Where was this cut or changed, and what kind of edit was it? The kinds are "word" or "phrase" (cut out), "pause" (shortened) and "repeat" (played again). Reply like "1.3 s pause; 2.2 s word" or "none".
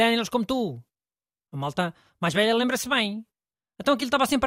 none